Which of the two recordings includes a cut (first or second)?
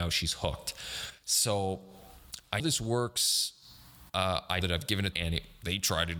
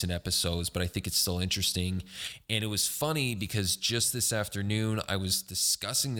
first